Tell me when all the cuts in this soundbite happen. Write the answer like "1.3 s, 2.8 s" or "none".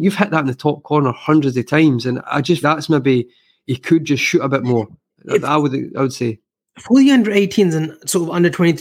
2.6 s